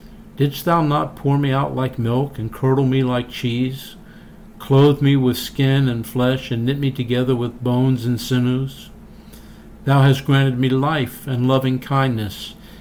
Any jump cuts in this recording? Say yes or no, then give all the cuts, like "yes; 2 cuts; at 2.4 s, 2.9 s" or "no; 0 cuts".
no; 0 cuts